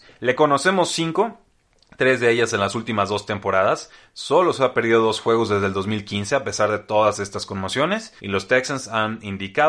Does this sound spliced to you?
yes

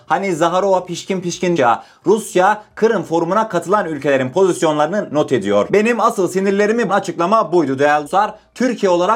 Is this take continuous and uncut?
no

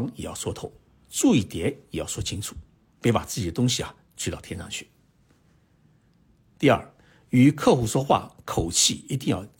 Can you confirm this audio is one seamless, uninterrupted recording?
yes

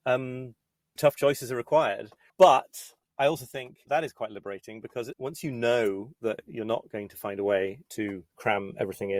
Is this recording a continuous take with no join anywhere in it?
no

